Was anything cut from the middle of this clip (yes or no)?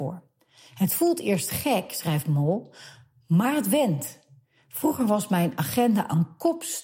no